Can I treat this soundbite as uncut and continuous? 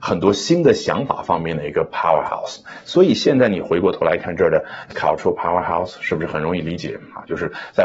no; 1 cut; at 4.9 s

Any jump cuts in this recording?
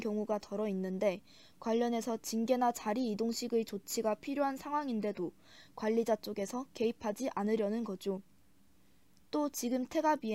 no; 0 cuts

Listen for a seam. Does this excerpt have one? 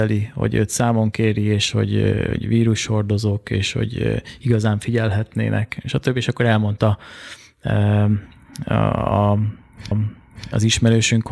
yes; 1 cut; at 9.9 s

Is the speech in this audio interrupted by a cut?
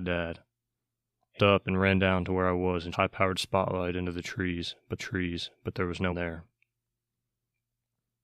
yes; 4 cuts; at 1.4 s, 2.9 s, 5.0 s, 6.1 s

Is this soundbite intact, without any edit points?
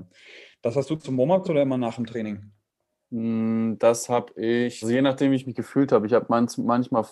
no; 3 cuts; at 1.0 s, 1.4 s, 4.8 s

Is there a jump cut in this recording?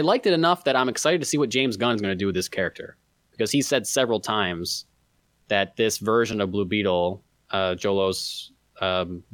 no; 0 cuts

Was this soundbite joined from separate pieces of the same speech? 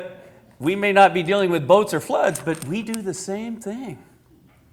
no; 0 cuts

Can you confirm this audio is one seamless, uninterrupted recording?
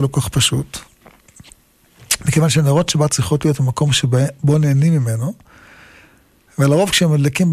yes; 0 cuts

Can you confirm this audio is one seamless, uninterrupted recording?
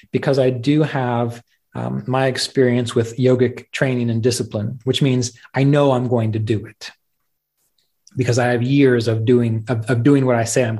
yes; 0 cuts

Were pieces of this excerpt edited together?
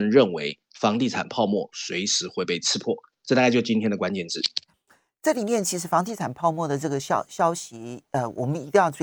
no; 0 cuts

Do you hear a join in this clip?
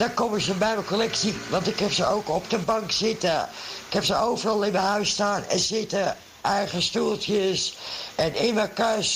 no; 0 cuts

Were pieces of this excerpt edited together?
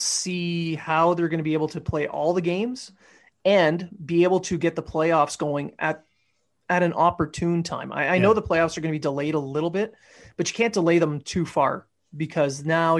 no; 0 cuts

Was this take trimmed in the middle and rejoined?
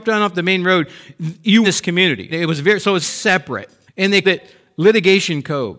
yes; 5 cuts; at 1.6 s, 2.3 s, 3.0 s, 3.9 s, 4.2 s

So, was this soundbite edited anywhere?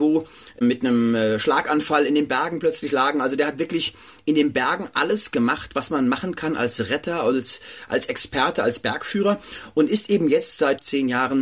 no; 0 cuts

